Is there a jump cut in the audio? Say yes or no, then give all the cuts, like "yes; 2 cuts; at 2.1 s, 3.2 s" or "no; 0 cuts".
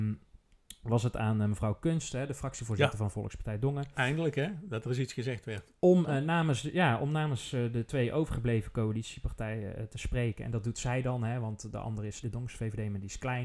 yes; 1 cut; at 12.2 s